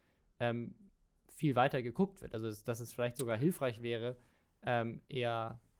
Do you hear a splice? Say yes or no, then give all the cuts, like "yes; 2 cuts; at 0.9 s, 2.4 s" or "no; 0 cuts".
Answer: no; 0 cuts